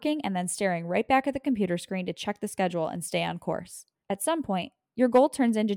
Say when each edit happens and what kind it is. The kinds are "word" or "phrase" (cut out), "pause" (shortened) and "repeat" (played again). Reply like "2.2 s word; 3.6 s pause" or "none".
4.0 s pause